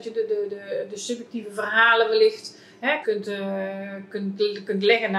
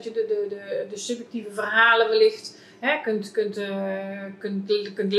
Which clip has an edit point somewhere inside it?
first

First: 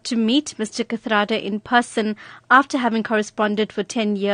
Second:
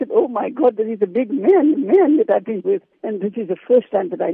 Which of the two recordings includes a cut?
second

